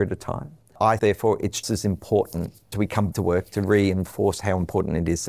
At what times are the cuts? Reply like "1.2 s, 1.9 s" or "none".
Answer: 1.0 s, 1.6 s, 2.7 s, 3.1 s